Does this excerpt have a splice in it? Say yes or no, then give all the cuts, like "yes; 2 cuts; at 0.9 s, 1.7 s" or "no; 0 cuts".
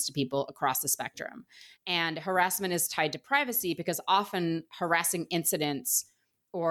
no; 0 cuts